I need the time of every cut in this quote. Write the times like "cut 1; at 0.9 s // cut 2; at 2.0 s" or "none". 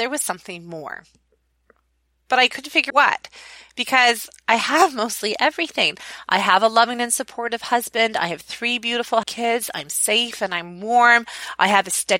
cut 1; at 2.9 s // cut 2; at 9.2 s